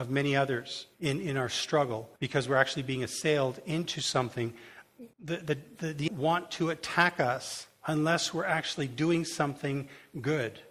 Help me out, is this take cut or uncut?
cut